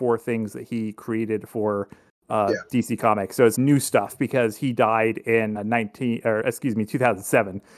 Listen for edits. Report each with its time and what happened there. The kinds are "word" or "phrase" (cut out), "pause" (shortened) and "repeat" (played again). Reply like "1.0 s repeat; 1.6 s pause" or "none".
3.5 s word; 5.5 s word